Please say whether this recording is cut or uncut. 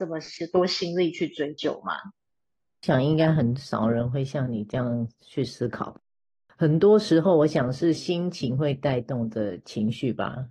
uncut